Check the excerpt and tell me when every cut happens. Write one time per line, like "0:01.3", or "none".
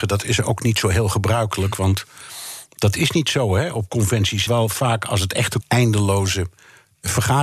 0:04.5
0:05.6